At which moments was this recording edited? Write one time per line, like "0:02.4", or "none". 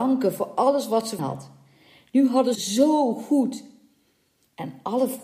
0:01.2
0:02.5

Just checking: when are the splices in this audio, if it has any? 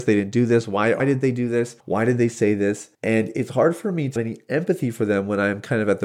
0:01.0
0:01.8
0:02.9
0:04.2

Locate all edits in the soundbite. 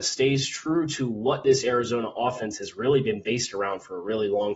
none

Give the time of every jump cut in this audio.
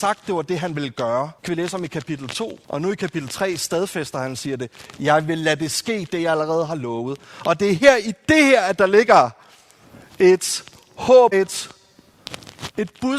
0:01.4
0:02.6
0:11.3

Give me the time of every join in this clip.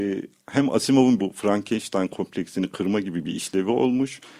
0:01.2

